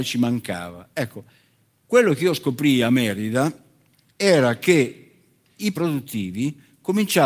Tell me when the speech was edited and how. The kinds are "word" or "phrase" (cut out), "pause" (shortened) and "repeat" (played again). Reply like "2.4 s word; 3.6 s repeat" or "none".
5.7 s word